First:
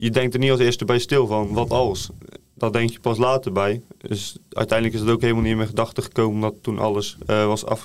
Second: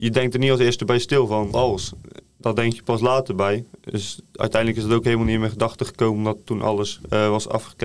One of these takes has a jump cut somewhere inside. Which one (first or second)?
second